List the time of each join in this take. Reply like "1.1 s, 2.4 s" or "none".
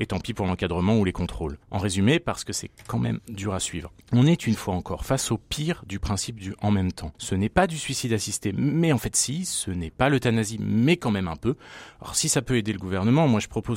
1.6 s, 4.0 s, 7.1 s